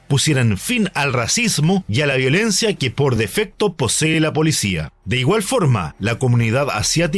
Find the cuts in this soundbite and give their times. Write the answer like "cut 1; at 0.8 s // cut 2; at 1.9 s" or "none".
none